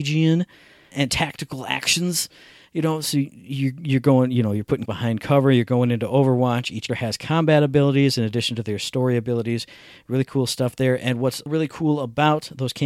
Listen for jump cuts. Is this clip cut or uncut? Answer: cut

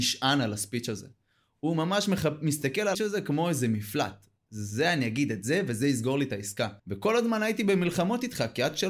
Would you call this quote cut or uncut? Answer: cut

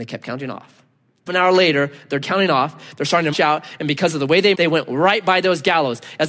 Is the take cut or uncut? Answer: cut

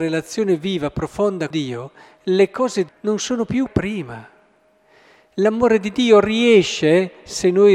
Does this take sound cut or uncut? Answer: cut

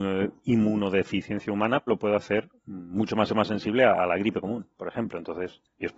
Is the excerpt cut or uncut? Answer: cut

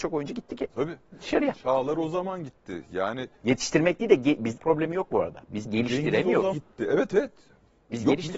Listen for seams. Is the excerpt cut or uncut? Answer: cut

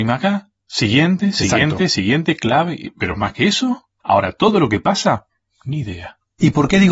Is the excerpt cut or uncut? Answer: uncut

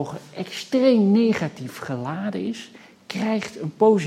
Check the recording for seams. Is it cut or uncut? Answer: uncut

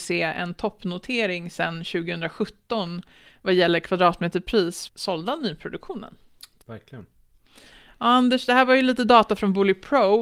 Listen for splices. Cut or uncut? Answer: cut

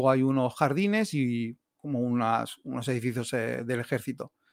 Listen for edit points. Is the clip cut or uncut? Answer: cut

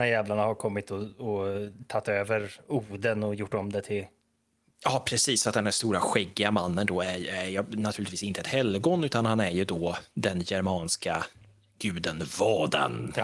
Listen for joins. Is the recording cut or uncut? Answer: uncut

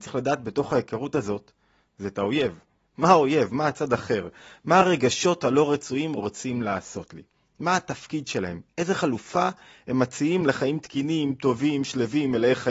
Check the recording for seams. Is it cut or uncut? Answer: uncut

